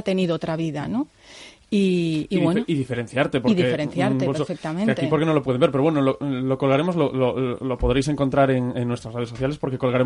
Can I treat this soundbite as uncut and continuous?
yes; 0 cuts

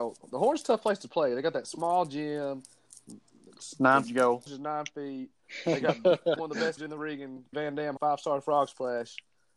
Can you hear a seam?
yes; 6 cuts; at 4.0 s, 4.5 s, 6.4 s, 6.8 s, 7.5 s, 8.0 s

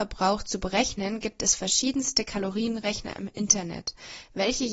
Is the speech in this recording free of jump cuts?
yes; 0 cuts

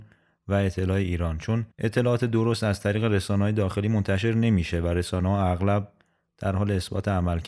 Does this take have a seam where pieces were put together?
yes; 1 cut; at 1.7 s

